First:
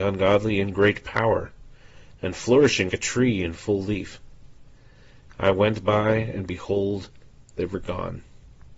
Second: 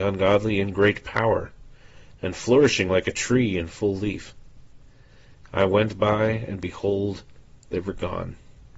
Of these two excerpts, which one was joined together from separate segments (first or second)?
first